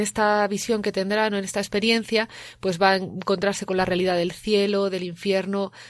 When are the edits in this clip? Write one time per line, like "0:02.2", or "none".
none